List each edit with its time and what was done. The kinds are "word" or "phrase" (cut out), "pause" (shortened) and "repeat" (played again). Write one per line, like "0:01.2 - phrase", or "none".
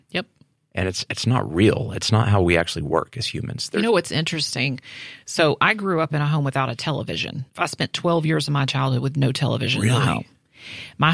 0:07.5 - pause